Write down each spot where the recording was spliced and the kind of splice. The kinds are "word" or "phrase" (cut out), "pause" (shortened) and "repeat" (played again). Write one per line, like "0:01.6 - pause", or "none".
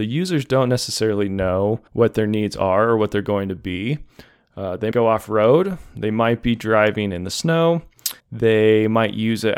0:01.9 - pause
0:04.9 - word
0:08.2 - pause